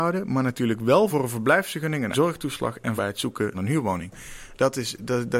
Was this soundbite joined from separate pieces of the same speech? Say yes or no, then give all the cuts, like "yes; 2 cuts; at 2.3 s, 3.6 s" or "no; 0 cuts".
yes; 4 cuts; at 1.1 s, 2.1 s, 3.0 s, 3.5 s